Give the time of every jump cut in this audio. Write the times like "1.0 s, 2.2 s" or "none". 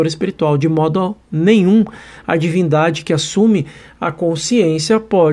none